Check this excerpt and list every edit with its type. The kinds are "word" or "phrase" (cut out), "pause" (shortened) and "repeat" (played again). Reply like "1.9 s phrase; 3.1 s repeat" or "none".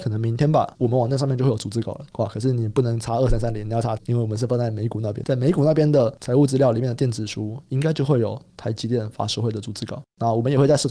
4.0 s word